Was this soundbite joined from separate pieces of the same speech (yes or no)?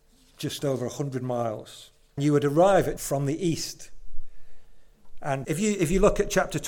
yes